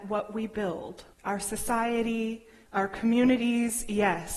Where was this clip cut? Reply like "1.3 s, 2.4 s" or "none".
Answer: 1.1 s, 2.7 s